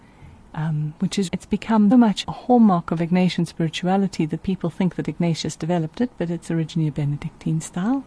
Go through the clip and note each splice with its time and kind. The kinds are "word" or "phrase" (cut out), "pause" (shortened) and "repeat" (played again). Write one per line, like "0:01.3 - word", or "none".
0:01.3 - word
0:01.9 - word
0:02.2 - word